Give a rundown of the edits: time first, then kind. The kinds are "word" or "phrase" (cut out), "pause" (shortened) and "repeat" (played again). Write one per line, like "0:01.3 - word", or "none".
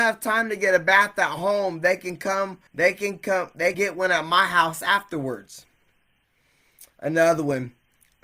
0:02.7 - pause
0:03.7 - word